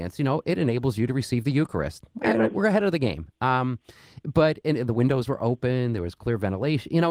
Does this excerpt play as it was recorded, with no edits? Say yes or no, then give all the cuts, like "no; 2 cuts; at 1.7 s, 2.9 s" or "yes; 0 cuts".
no; 1 cut; at 2.1 s